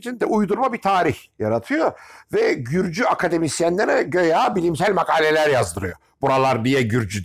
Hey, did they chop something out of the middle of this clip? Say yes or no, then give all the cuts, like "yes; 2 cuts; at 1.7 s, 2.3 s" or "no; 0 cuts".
no; 0 cuts